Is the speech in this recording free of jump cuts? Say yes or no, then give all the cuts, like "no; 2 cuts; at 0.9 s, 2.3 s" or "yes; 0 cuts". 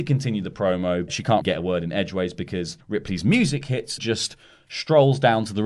no; 4 cuts; at 1.1 s, 1.4 s, 2.8 s, 4.0 s